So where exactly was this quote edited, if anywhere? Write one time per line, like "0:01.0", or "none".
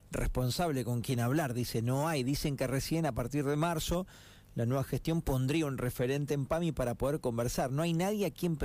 none